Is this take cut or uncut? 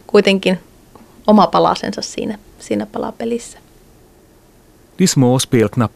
uncut